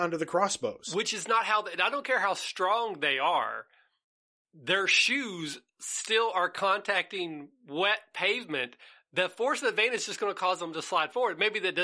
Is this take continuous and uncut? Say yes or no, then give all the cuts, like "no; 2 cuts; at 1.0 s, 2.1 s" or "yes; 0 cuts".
yes; 0 cuts